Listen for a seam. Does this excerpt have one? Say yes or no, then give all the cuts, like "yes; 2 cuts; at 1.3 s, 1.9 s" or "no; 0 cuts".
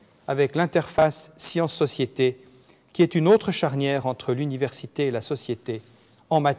no; 0 cuts